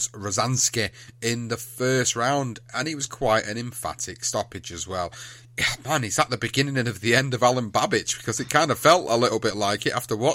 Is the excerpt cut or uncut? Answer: uncut